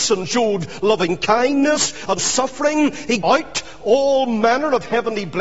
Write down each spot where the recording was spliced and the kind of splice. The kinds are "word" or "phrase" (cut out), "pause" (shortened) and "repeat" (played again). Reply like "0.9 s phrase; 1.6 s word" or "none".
2.2 s word; 3.2 s word